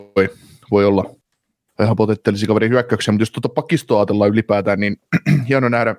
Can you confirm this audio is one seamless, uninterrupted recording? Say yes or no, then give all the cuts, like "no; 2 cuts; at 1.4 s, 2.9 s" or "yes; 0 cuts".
yes; 0 cuts